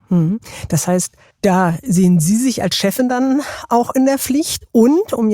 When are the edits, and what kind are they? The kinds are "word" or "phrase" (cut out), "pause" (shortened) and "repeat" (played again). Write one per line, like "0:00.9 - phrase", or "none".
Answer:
0:01.3 - pause